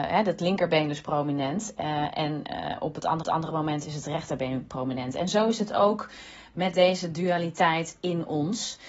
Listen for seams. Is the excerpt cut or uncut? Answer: cut